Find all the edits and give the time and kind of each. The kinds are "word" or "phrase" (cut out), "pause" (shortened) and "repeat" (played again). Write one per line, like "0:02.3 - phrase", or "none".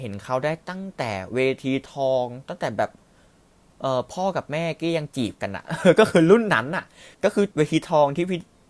0:07.1 - pause
0:07.5 - pause

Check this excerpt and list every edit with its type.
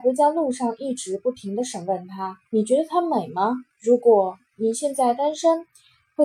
0:02.4 - pause
0:03.7 - pause

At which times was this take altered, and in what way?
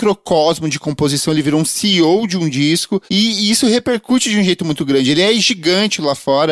0:03.1 - pause

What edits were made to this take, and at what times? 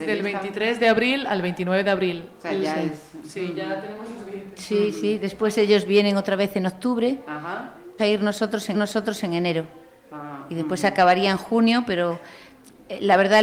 0:08.0 - phrase
0:08.7 - repeat

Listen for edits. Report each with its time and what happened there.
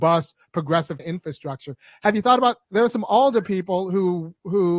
0:01.0 - word
0:02.6 - pause

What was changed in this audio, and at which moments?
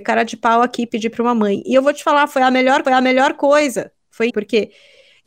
0:02.8 - repeat
0:04.3 - word

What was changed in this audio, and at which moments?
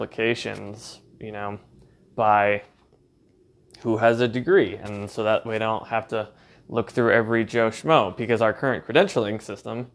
none

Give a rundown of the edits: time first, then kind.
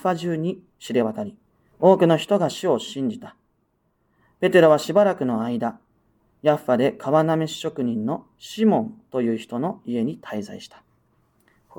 none

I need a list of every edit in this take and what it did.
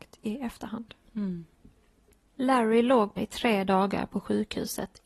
0:02.0 - pause
0:03.2 - phrase

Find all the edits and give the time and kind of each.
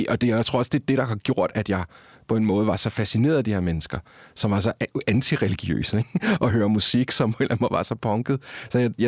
none

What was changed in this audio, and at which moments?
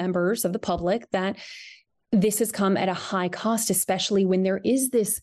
none

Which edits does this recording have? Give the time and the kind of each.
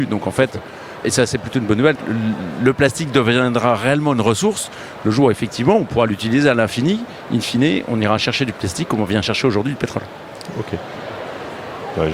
0:01.0 - word
0:02.0 - word

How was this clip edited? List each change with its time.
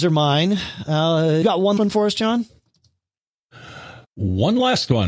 0:01.4 - word
0:01.8 - word
0:04.0 - pause

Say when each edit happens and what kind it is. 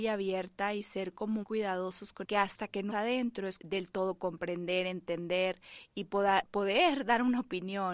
0:01.4 - word
0:02.2 - phrase
0:02.9 - word
0:03.6 - phrase

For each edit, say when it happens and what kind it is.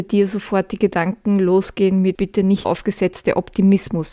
0:02.1 - phrase
0:02.6 - word

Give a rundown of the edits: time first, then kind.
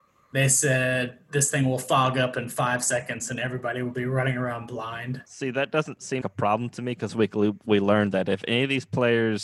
0:05.3 - pause
0:06.2 - word
0:07.1 - word

